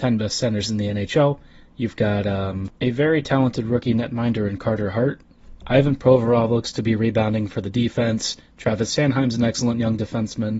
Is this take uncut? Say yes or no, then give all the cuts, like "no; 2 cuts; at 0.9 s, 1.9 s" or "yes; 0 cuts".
yes; 0 cuts